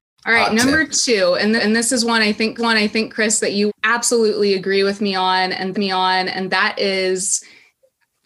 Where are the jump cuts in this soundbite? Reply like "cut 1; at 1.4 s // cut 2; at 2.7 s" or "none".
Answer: cut 1; at 1.6 s // cut 2; at 2.6 s // cut 3; at 3.7 s // cut 4; at 5.7 s